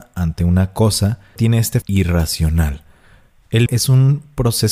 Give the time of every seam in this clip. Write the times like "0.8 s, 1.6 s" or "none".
1.4 s, 1.8 s, 3.7 s